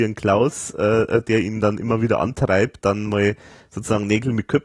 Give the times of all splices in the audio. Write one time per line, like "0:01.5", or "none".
0:02.8